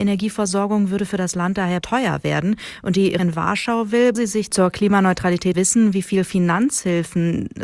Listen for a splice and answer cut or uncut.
cut